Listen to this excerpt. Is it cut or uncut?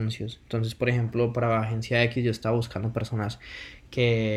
uncut